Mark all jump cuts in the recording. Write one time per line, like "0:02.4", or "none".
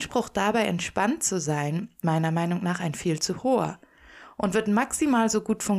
0:02.0